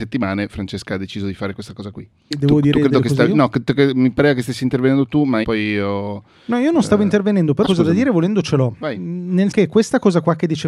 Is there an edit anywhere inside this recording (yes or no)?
yes